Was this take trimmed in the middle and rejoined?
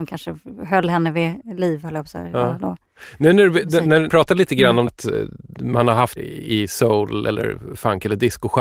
yes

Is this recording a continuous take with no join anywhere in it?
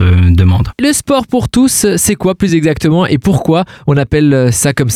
yes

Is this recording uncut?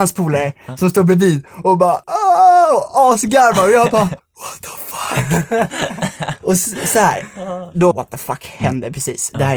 no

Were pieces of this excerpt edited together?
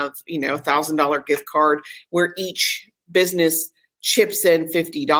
no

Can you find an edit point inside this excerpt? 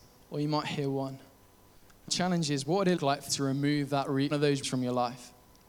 yes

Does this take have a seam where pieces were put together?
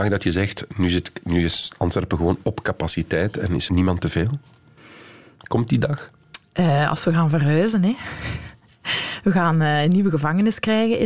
yes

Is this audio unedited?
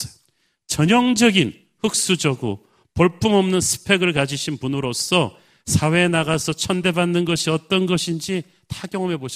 yes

